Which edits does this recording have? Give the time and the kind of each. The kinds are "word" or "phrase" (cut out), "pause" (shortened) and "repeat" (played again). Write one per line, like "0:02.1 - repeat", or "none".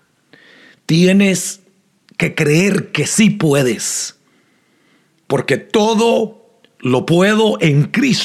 none